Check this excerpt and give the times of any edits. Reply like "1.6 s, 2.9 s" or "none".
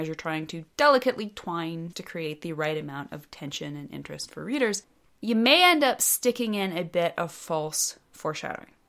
1.9 s